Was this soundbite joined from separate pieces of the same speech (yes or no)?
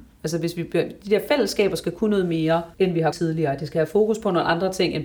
yes